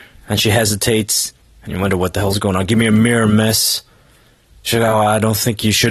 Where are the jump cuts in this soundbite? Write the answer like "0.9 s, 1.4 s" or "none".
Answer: none

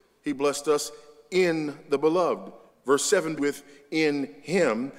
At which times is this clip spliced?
2.7 s, 3.4 s

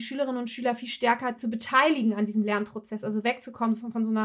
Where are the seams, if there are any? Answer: none

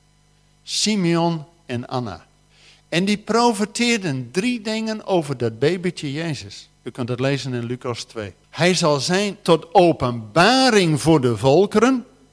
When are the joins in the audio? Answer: 2.5 s, 6.8 s, 8.4 s, 9.4 s

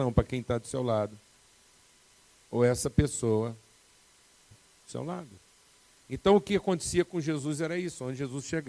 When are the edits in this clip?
4.5 s

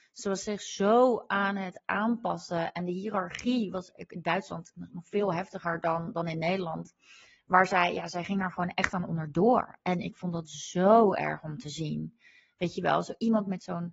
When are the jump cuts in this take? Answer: none

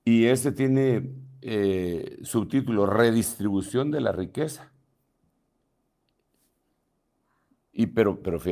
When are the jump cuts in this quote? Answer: none

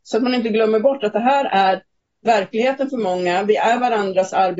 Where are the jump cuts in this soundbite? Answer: 2.0 s

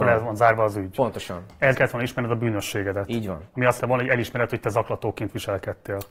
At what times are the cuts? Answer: 1.7 s, 3.8 s

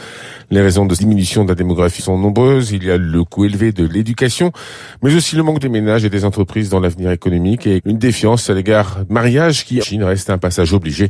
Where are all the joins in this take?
1.0 s, 2.0 s, 5.6 s, 7.8 s, 9.1 s, 9.8 s

